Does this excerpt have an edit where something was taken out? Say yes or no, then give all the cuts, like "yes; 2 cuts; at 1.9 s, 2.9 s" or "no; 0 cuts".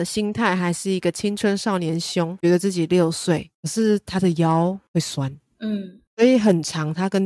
no; 0 cuts